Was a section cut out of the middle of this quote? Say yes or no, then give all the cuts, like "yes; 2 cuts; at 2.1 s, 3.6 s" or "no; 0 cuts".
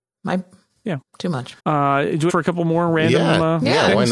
yes; 3 cuts; at 1.1 s, 1.6 s, 2.3 s